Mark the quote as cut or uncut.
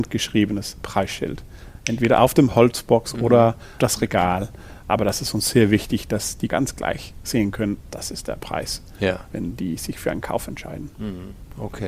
cut